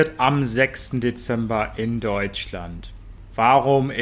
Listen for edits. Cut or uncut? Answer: uncut